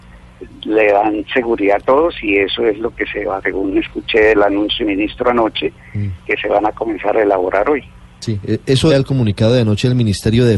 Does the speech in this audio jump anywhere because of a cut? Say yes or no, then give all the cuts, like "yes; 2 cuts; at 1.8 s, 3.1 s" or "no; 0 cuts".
yes; 3 cuts; at 3.4 s, 4.8 s, 8.9 s